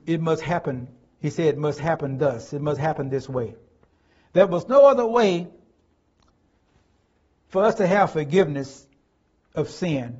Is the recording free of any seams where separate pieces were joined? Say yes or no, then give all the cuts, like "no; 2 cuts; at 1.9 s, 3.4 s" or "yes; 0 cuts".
yes; 0 cuts